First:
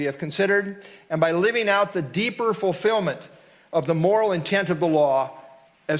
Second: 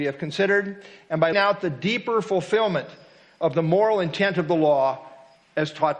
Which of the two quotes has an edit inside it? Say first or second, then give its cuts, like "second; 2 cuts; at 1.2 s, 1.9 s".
second; 1 cut; at 1.3 s